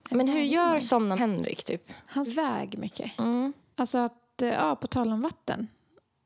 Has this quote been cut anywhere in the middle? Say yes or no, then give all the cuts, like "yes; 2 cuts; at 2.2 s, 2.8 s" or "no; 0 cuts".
yes; 2 cuts; at 1.2 s, 2.3 s